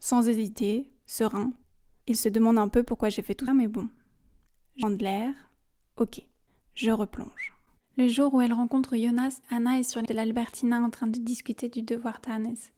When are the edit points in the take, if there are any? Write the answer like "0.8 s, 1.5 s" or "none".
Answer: 3.5 s, 4.8 s, 9.4 s, 10.1 s